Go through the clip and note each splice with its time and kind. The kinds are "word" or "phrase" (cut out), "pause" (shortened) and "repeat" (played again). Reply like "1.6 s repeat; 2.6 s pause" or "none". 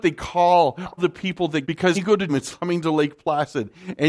1.0 s word; 1.6 s word; 1.9 s word; 2.3 s word; 2.6 s word